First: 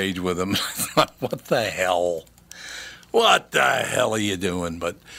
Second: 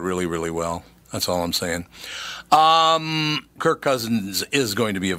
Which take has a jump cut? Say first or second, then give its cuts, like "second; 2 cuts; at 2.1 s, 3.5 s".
second; 1 cut; at 3.6 s